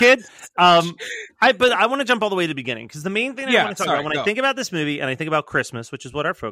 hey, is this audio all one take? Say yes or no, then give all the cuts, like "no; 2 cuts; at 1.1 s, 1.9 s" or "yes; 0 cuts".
yes; 0 cuts